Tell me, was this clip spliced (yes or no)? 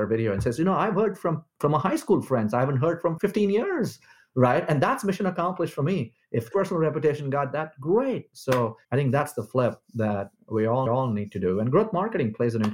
yes